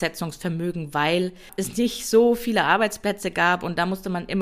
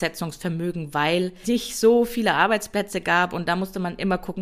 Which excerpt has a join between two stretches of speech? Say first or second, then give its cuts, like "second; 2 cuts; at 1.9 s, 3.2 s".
second; 1 cut; at 1.4 s